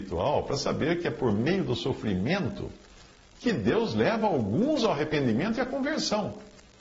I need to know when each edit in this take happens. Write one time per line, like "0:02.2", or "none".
none